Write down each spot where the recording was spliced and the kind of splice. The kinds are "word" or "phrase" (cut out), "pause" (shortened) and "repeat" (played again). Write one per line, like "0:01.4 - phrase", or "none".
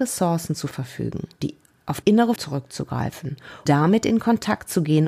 0:01.4 - word
0:02.0 - word
0:02.4 - word
0:03.7 - word